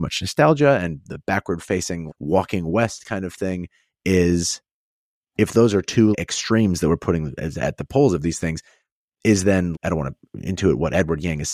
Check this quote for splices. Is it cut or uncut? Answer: cut